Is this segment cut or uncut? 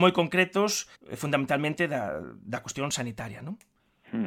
cut